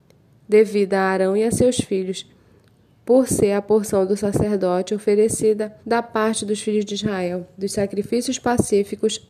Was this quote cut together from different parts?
yes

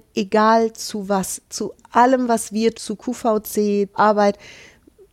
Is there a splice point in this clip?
yes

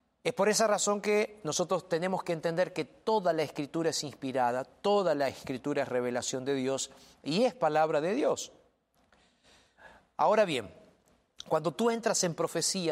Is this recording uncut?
yes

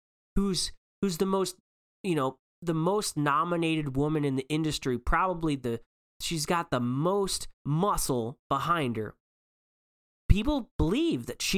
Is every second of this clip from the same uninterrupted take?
no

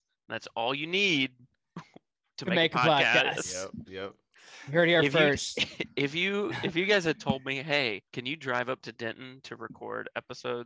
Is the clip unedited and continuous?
no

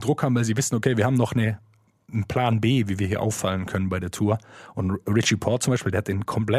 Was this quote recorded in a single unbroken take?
yes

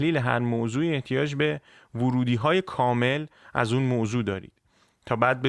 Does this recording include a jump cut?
no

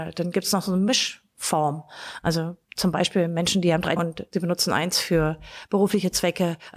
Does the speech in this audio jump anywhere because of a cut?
yes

